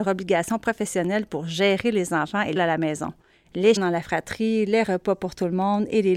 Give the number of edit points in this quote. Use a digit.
2